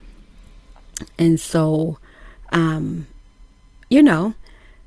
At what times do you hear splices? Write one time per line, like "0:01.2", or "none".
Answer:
none